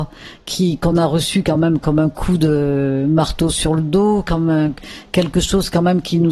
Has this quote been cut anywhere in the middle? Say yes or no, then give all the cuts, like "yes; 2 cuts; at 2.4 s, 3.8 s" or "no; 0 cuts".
no; 0 cuts